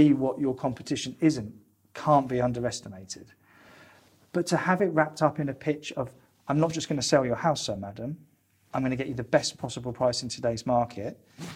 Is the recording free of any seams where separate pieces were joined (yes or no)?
yes